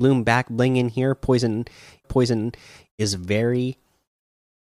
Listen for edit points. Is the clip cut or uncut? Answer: cut